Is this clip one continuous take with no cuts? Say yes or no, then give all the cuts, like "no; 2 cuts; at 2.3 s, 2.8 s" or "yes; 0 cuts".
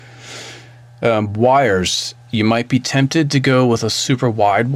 yes; 0 cuts